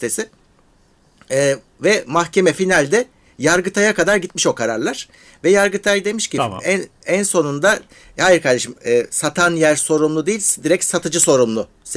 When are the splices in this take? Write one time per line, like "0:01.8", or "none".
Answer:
none